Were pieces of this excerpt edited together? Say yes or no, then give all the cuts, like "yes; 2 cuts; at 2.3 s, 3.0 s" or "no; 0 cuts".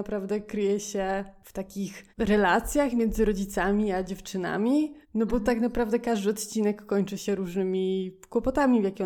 yes; 2 cuts; at 2.1 s, 5.0 s